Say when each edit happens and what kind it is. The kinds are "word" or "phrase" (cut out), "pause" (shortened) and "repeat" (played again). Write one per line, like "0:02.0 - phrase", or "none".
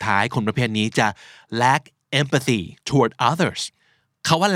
0:02.8 - pause